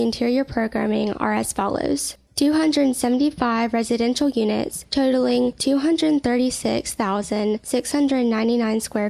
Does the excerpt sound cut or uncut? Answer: uncut